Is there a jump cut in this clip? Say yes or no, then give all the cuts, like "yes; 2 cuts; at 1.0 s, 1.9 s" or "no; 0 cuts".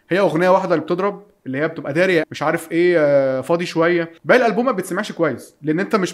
yes; 2 cuts; at 2.2 s, 4.2 s